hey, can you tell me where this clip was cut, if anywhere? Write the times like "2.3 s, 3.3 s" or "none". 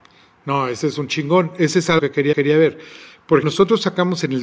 2.0 s, 2.3 s, 3.4 s